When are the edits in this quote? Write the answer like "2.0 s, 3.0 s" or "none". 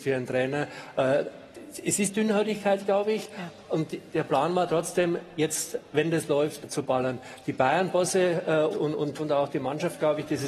6.6 s, 8.7 s, 9.2 s